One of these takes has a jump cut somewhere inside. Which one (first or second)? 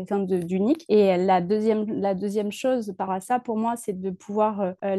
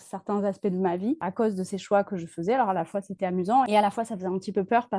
first